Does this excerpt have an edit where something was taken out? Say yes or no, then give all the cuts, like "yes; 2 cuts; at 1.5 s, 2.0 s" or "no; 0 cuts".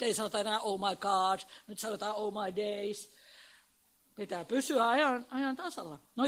no; 0 cuts